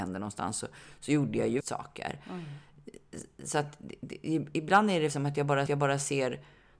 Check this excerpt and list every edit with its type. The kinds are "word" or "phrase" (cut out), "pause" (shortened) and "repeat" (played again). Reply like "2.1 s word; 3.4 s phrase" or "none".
1.6 s word; 5.1 s phrase; 5.7 s repeat

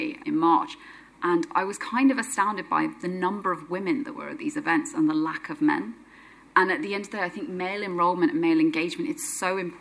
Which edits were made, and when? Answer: none

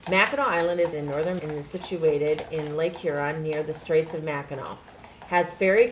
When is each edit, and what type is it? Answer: 0.9 s word; 1.4 s word

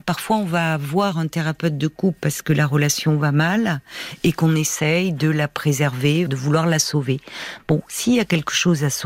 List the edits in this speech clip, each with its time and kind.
6.3 s word

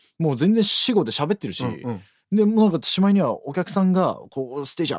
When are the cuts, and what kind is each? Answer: none

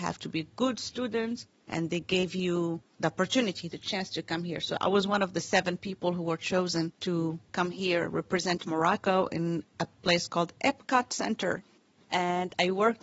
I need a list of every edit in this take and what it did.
none

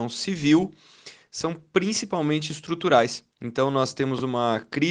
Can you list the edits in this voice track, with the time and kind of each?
3.3 s pause

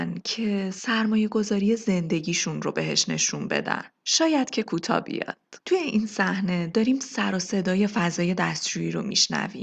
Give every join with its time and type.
5.6 s pause

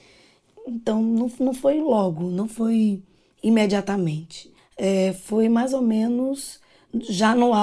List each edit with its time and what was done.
4.6 s pause

